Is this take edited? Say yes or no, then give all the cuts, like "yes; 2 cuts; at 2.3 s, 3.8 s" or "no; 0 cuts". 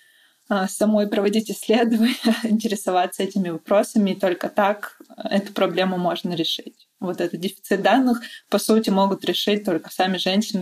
no; 0 cuts